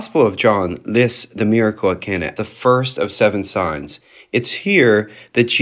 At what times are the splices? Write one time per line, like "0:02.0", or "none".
0:02.4

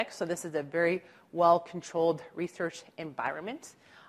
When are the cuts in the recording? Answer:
none

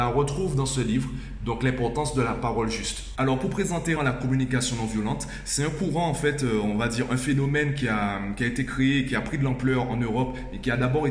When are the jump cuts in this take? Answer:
0:04.0

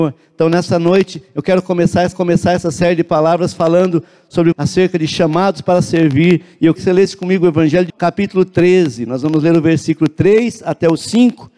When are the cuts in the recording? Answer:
0:02.1
0:04.5
0:06.8
0:07.9

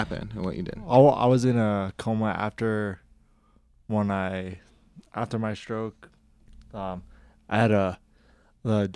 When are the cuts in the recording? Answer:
none

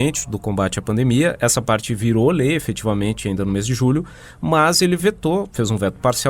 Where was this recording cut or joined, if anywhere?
none

